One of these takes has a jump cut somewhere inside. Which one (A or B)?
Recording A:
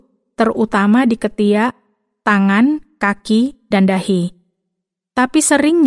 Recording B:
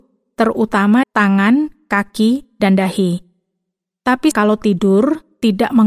B